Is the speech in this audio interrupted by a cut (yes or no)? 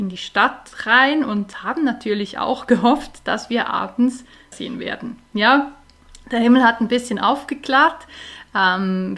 yes